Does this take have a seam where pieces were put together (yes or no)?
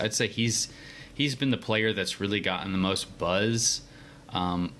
no